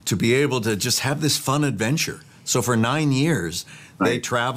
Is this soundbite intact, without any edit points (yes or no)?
yes